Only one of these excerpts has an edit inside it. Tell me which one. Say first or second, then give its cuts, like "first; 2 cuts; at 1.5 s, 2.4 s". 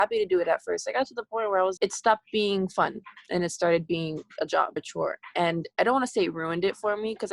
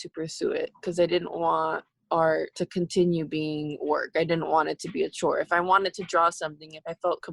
first; 2 cuts; at 1.8 s, 4.8 s